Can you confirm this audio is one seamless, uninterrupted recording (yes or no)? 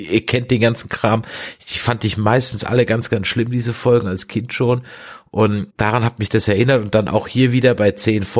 no